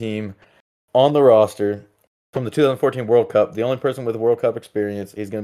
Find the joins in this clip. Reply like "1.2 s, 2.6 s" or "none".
none